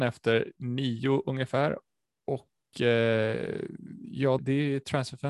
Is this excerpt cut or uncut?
cut